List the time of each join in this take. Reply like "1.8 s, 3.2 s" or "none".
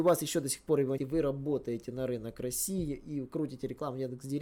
1.0 s